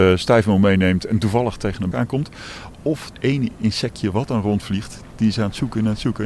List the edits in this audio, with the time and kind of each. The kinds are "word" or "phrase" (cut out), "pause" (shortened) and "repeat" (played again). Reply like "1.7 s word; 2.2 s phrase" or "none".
1.9 s word; 3.1 s word